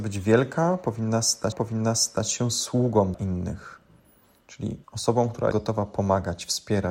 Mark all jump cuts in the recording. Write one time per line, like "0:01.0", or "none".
0:01.5
0:03.1
0:04.8
0:05.5

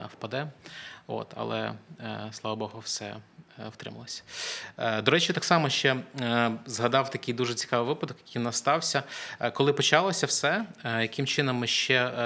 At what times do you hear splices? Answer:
none

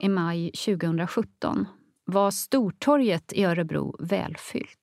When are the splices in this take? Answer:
none

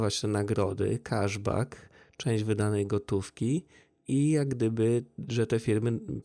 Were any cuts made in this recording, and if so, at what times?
none

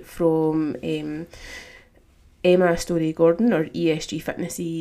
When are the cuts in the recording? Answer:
none

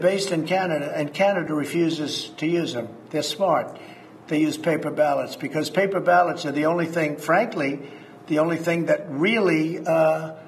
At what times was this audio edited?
none

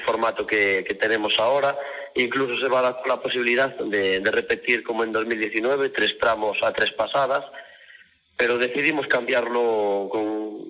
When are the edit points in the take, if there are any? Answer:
none

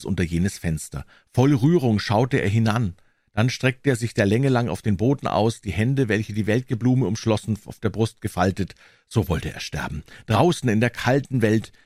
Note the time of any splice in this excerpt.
none

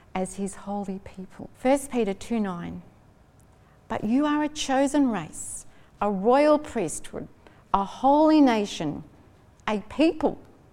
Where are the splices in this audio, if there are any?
0:01.5

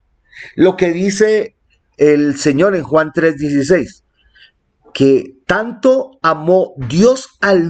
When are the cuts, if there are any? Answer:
none

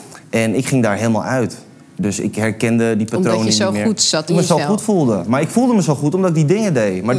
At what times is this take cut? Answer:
0:04.3

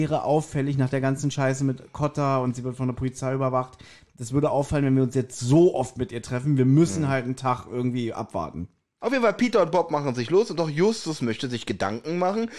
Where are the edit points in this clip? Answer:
none

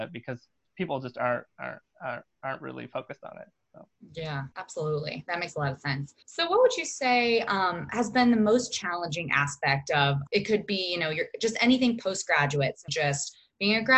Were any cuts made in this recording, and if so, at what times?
0:04.5
0:06.2
0:10.3
0:12.9

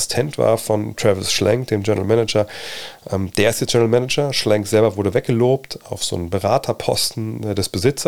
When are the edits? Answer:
none

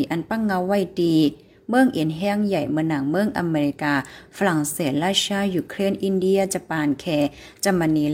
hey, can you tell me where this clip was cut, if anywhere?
none

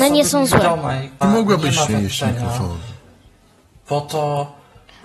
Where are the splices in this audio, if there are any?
0:01.2
0:01.9

